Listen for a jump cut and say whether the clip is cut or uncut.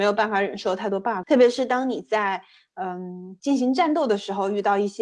cut